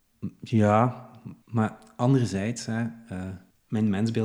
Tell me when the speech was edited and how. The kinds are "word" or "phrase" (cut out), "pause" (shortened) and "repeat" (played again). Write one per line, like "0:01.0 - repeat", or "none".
0:01.4 - pause